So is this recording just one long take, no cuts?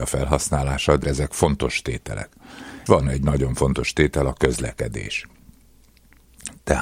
no; 2 cuts; at 1.0 s, 2.9 s

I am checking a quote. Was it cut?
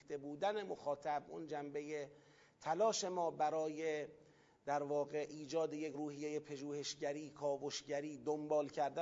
no; 0 cuts

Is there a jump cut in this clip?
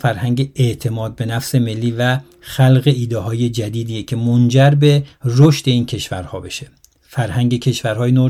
no; 0 cuts

